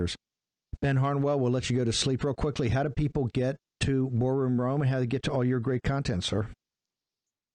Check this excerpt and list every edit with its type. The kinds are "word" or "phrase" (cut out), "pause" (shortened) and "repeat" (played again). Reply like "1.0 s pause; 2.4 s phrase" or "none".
3.7 s pause